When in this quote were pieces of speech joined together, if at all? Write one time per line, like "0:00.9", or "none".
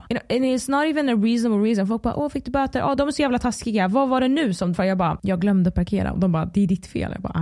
0:03.0
0:04.7

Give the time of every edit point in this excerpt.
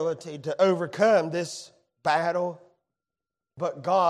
none

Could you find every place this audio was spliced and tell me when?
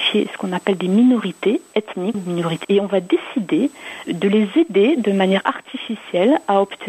0:02.1
0:02.6
0:04.0

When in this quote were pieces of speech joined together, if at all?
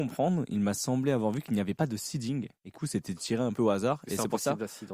0:02.7

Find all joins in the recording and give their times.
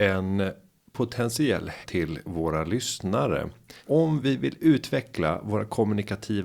0:01.8
0:03.8

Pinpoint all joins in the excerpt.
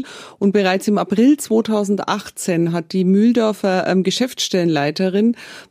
none

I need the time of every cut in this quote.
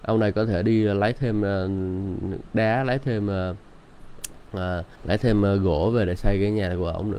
0:04.9

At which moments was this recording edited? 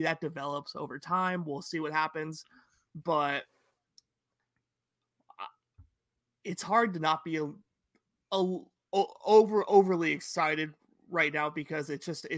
none

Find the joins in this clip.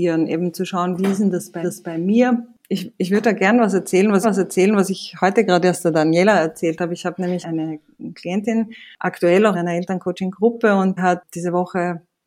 0:01.6
0:04.2
0:07.4
0:09.5
0:11.0

